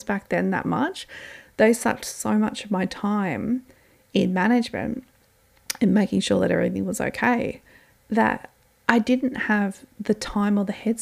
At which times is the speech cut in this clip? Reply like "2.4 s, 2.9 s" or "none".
none